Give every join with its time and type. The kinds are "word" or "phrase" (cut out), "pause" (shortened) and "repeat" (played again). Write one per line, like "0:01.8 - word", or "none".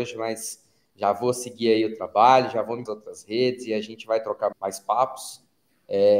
0:02.9 - phrase
0:04.5 - word